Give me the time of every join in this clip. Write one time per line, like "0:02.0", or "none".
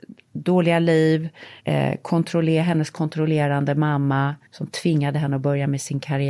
0:01.6
0:04.5